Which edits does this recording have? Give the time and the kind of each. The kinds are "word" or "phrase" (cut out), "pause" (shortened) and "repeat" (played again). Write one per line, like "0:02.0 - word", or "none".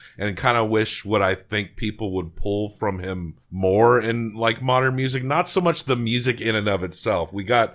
0:03.4 - pause